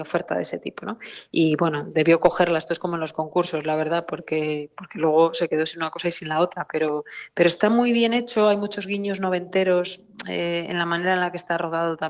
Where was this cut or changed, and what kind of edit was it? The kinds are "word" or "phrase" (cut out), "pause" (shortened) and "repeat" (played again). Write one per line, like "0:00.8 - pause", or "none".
none